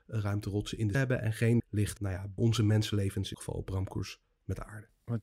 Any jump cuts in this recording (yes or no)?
yes